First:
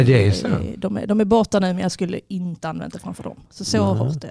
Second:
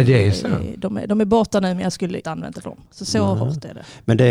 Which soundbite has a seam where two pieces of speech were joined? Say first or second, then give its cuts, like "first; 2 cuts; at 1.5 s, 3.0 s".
second; 2 cuts; at 2.2 s, 2.6 s